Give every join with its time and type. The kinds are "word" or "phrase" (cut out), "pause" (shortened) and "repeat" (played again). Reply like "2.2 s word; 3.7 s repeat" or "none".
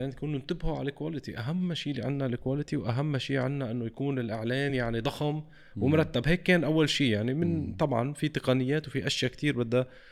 none